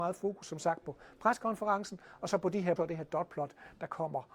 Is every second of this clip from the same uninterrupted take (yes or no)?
no